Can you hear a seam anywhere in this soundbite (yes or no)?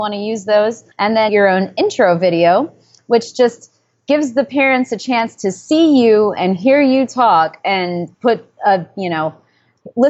yes